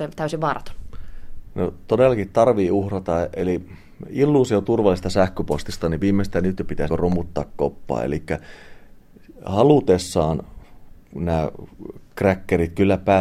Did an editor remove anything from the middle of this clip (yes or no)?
yes